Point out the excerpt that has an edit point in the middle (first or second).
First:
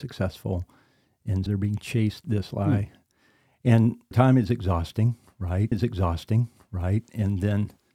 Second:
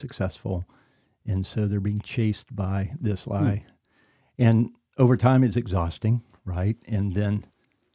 first